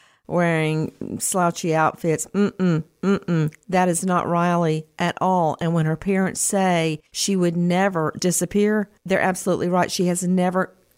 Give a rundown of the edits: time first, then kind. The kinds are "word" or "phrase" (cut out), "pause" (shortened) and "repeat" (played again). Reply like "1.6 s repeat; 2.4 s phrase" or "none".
7.1 s pause; 8.2 s word; 9.0 s pause